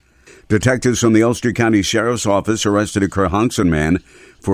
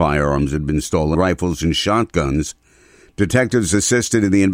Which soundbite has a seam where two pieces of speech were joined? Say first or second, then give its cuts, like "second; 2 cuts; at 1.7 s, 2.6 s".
second; 1 cut; at 1.1 s